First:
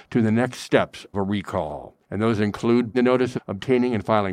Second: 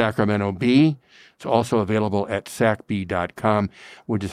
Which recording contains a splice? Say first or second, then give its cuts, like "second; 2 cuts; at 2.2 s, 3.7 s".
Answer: first; 4 cuts; at 1.1 s, 2.0 s, 2.9 s, 3.4 s